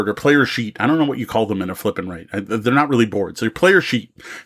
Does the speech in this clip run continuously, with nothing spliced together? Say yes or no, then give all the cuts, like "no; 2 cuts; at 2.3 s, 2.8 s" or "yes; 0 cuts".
yes; 0 cuts